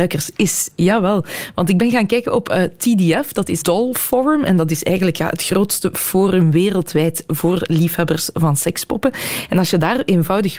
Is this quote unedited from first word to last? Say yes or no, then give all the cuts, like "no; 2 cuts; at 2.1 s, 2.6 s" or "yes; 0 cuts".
no; 1 cut; at 3.6 s